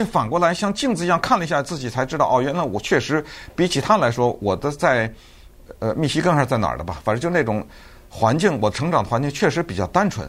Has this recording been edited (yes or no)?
no